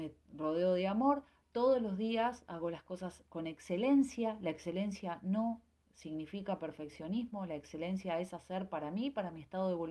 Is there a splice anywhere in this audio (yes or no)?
no